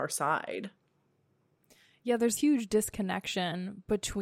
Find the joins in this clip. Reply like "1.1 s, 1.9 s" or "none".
2.4 s

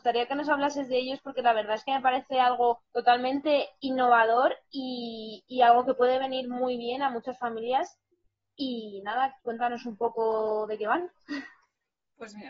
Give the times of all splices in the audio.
2.9 s, 9.4 s

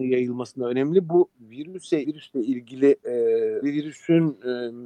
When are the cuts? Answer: 2.0 s, 3.6 s

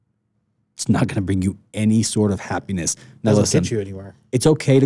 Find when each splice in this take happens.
none

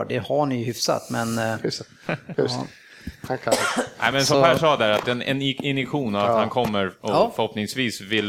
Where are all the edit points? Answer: none

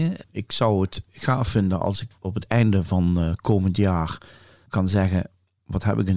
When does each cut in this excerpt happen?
none

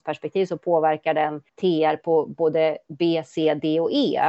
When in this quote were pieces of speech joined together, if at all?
1.5 s

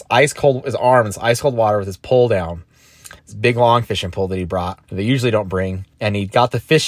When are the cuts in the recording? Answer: 3.2 s, 4.8 s, 5.9 s

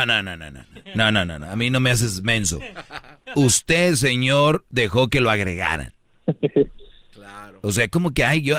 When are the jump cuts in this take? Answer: none

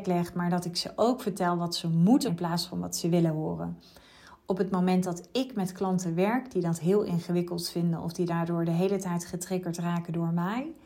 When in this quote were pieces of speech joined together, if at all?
2.3 s

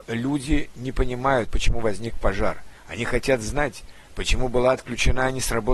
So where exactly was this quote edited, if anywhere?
1.5 s, 2.8 s

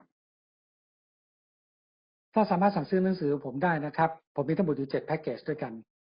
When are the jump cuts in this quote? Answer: 4.2 s

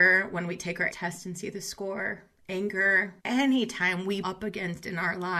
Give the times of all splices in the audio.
0.9 s, 3.2 s, 4.2 s

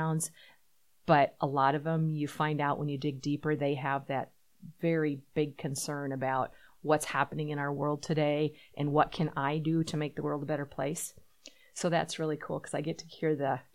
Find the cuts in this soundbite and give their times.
none

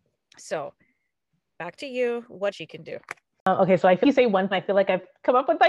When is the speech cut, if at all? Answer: 2.5 s, 3.3 s, 4.0 s, 4.5 s

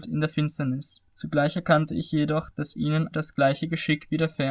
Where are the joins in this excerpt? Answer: 1.1 s, 3.1 s

